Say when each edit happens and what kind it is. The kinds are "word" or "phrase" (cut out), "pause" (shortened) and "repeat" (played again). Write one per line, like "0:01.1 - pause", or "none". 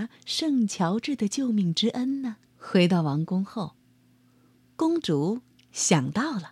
0:02.5 - pause